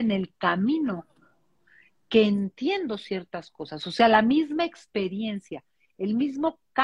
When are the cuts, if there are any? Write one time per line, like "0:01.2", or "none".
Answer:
none